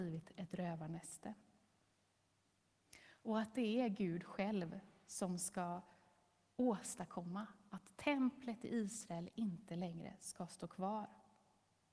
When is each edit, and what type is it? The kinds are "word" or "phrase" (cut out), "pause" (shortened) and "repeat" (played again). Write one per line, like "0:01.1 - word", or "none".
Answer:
none